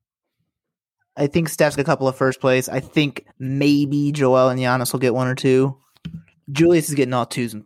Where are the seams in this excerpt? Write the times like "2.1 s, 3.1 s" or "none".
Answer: 1.8 s, 3.3 s